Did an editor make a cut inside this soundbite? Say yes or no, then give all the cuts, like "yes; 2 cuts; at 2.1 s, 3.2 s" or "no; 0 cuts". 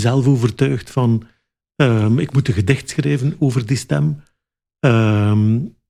no; 0 cuts